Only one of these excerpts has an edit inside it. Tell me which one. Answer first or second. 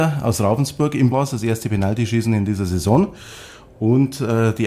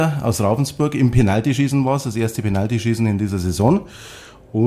first